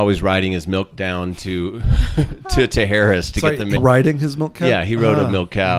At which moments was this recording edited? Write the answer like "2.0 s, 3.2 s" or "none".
0.9 s, 3.8 s